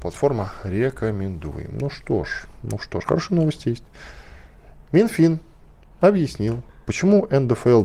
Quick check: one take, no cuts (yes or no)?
yes